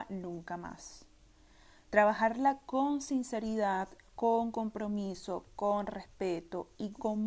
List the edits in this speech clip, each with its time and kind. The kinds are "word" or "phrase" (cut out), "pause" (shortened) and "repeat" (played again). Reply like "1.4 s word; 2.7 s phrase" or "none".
none